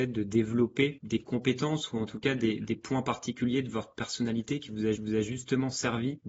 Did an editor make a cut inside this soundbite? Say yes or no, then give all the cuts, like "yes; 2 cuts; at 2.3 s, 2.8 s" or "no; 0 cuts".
yes; 1 cut; at 5.0 s